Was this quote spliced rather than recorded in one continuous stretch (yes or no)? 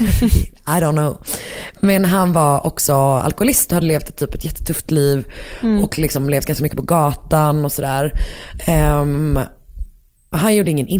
no